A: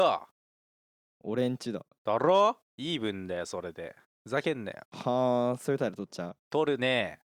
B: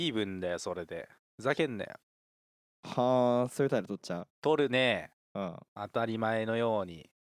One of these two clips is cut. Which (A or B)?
A